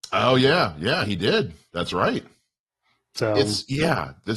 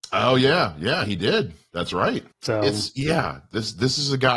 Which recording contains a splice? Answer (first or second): second